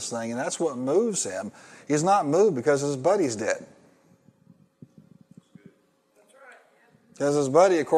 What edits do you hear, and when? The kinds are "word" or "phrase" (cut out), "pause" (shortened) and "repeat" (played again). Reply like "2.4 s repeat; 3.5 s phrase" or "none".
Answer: none